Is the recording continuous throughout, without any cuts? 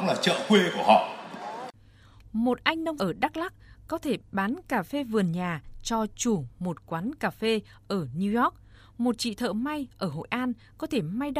no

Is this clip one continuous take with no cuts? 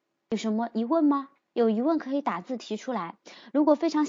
yes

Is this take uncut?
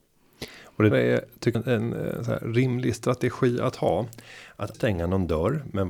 no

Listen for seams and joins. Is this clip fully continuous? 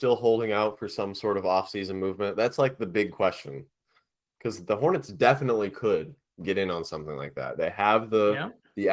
yes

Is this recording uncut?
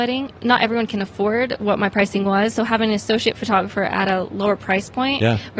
yes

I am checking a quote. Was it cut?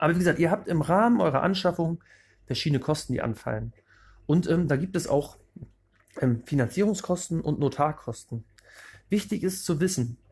no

